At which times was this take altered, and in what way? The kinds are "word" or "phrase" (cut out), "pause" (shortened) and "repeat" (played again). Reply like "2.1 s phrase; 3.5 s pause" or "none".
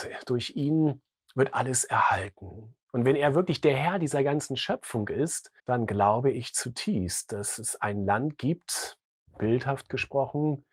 2.8 s pause; 5.6 s pause